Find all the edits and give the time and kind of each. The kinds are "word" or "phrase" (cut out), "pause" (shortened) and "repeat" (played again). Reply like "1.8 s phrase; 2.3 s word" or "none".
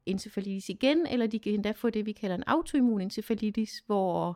none